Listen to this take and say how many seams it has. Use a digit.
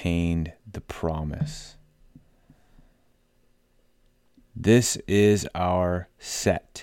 0